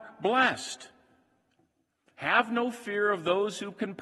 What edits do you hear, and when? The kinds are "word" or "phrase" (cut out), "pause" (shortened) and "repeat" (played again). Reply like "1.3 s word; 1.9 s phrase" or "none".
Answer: none